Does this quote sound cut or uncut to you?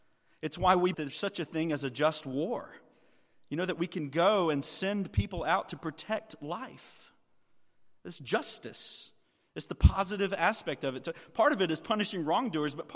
cut